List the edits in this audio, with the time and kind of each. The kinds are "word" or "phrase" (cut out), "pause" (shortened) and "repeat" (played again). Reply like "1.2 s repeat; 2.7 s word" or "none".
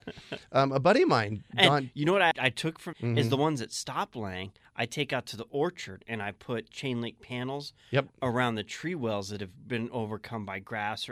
2.3 s word; 2.9 s word